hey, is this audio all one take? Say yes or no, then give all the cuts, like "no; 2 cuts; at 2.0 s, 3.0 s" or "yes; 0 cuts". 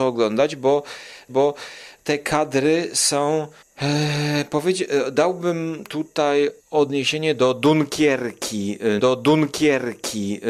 no; 4 cuts; at 1.3 s, 3.6 s, 6.6 s, 9.0 s